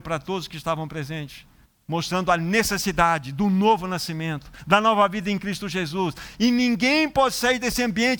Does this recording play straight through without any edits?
no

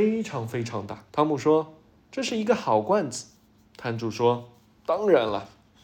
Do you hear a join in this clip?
yes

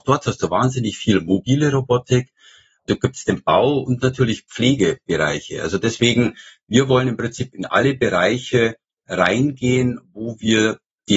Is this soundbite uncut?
yes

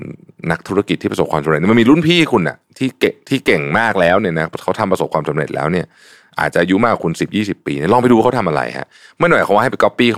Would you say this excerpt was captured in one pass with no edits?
yes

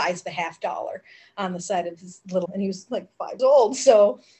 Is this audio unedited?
no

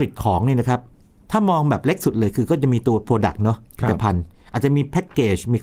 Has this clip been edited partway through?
no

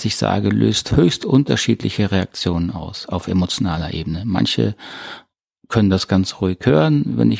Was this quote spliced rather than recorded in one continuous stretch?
no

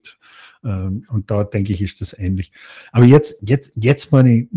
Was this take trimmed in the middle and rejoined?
no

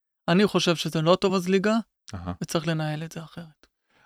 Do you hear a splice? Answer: no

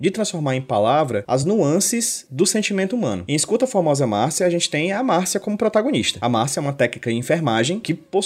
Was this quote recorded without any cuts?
yes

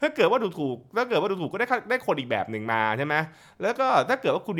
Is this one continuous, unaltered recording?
yes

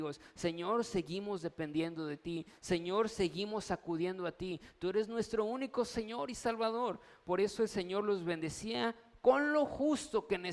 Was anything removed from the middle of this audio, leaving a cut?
no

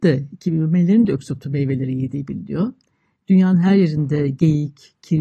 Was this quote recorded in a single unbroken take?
yes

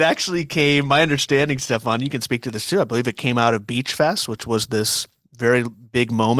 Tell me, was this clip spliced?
no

